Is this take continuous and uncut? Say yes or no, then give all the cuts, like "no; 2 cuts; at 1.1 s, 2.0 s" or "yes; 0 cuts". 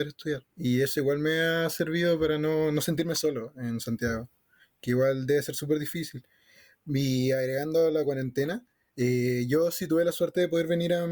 yes; 0 cuts